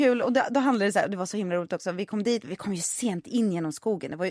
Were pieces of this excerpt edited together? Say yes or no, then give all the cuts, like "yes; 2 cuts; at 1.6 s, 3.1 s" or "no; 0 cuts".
no; 0 cuts